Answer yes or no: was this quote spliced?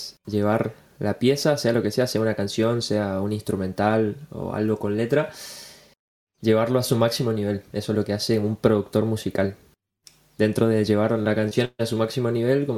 no